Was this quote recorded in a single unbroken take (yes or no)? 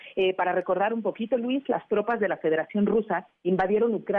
yes